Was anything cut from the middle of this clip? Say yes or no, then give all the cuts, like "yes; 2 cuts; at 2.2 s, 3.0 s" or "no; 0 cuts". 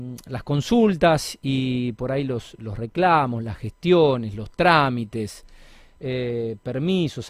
no; 0 cuts